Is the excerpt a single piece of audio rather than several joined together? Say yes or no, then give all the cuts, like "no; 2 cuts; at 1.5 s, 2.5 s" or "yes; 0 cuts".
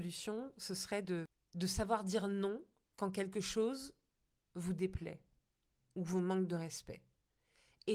yes; 0 cuts